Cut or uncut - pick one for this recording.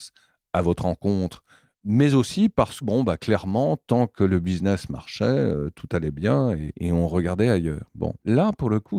cut